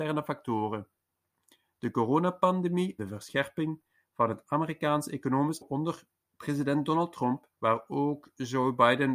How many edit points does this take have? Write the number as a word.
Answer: three